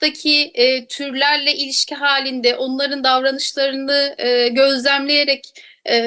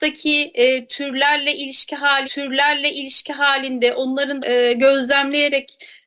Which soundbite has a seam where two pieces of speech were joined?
second; 2 cuts; at 2.2 s, 4.4 s

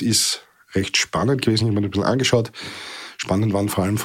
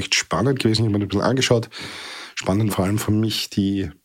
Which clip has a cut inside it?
second; 1 cut; at 2.7 s

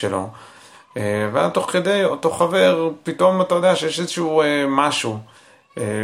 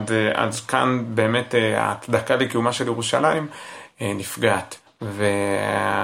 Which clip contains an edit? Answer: second; 1 cut; at 4.9 s

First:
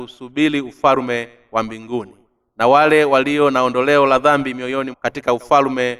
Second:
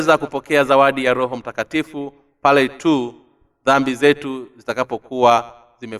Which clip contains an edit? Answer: first; 1 cut; at 4.9 s

